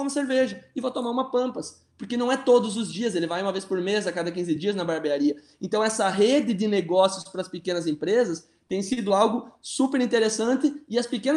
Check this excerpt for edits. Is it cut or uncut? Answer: uncut